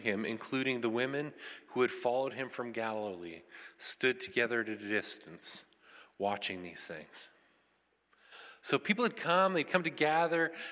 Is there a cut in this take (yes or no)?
no